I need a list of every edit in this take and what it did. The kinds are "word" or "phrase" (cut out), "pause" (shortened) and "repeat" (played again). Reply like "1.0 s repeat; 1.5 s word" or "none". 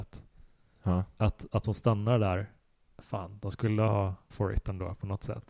1.6 s word; 4.3 s word